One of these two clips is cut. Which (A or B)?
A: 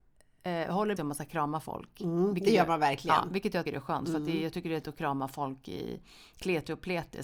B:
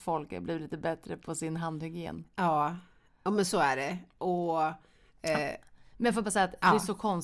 A